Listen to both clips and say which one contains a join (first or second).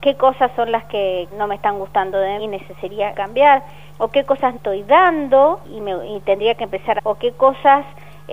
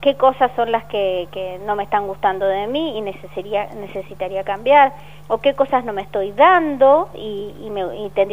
first